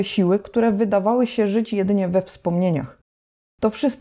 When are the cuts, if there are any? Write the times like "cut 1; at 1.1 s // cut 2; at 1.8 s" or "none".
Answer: none